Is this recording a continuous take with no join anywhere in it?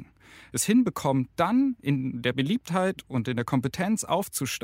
yes; 0 cuts

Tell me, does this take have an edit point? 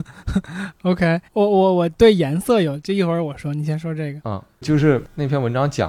yes; 2 cuts; at 1.3 s, 4.6 s

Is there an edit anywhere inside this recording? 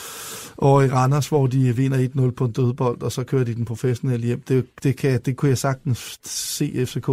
no; 0 cuts

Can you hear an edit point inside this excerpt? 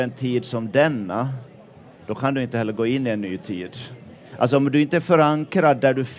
no; 0 cuts

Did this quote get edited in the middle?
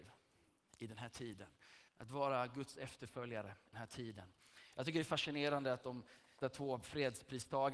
yes; 3 cuts; at 1.9 s, 3.7 s, 6.4 s

